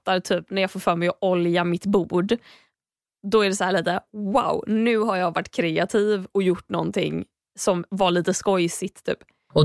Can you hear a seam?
no; 0 cuts

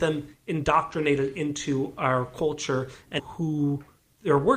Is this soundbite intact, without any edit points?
no; 1 cut; at 3.2 s

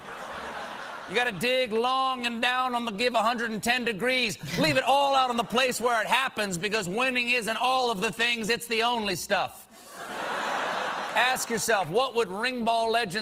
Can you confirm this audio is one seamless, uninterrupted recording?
no; 1 cut; at 2.9 s

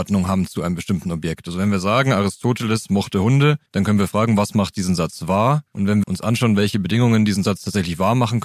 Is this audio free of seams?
no; 3 cuts; at 3.7 s, 5.7 s, 6.0 s

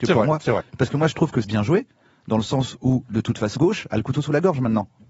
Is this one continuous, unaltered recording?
no; 2 cuts; at 1.4 s, 3.6 s

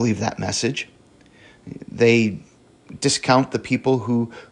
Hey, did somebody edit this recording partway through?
no; 0 cuts

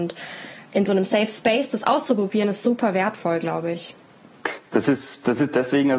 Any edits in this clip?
no; 0 cuts

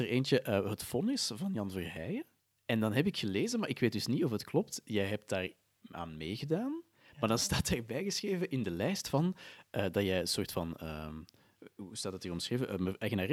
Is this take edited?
no; 0 cuts

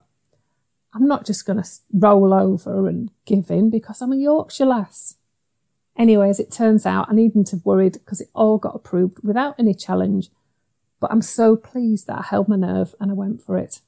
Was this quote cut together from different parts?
no; 0 cuts

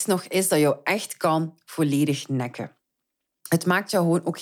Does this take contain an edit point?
no; 0 cuts

